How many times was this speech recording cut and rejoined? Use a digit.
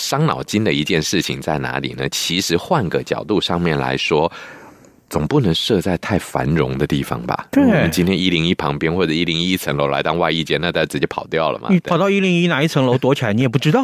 0